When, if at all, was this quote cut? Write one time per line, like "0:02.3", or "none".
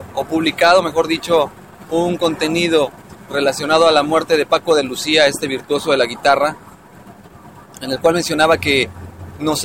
none